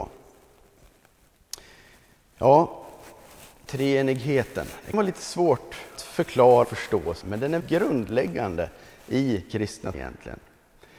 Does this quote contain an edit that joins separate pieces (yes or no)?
yes